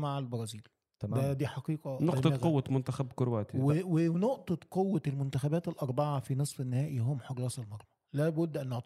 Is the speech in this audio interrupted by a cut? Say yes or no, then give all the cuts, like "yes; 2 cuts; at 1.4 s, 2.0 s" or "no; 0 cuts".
no; 0 cuts